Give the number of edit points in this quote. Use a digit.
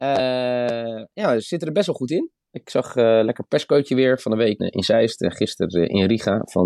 1